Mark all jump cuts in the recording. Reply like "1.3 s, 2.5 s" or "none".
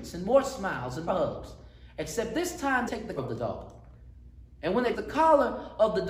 1.1 s, 2.9 s, 3.2 s, 4.9 s